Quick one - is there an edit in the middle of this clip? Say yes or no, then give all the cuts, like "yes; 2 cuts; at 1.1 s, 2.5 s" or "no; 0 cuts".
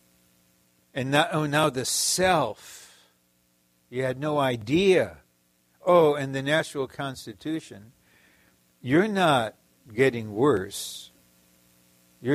no; 0 cuts